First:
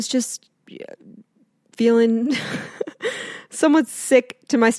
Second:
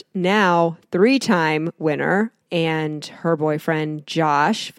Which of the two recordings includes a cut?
second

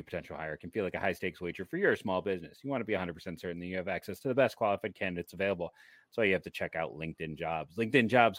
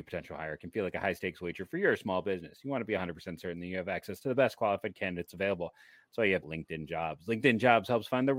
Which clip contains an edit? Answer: second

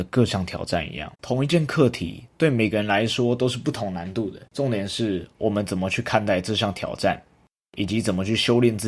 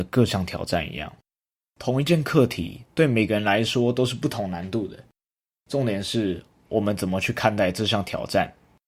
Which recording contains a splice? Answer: first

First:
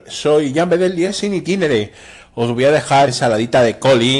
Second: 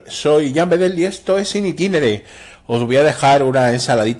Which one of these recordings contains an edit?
first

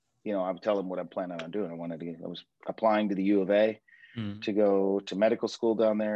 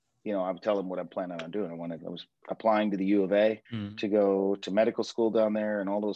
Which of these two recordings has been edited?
second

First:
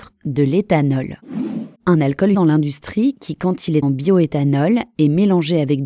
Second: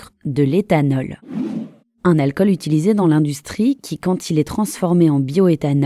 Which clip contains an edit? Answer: first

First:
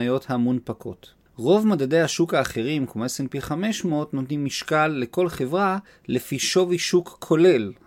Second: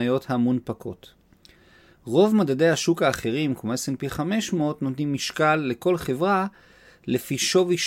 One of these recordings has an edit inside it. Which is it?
first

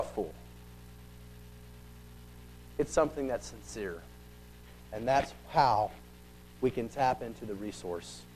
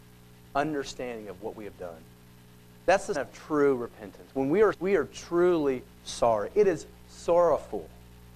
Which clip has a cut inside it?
second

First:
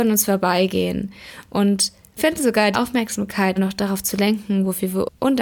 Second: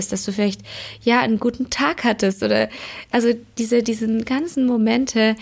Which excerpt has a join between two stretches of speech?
first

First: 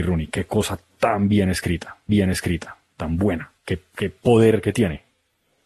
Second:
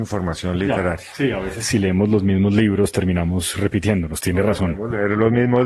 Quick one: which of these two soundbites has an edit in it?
first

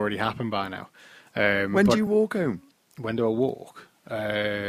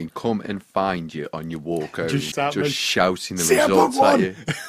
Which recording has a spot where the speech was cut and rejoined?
second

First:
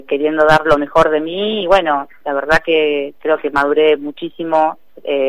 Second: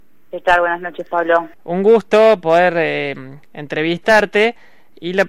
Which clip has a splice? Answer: second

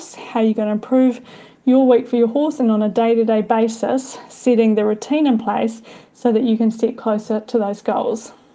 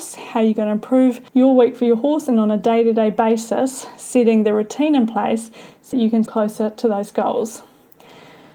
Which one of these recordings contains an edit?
second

